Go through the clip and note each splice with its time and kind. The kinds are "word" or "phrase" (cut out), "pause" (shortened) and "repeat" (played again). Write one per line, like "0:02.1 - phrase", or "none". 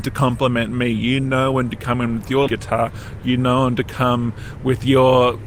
0:02.5 - word